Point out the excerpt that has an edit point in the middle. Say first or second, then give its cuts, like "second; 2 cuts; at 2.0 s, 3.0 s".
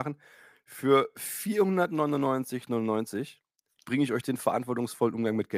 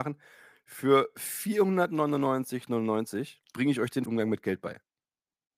second; 2 cuts; at 3.4 s, 4.1 s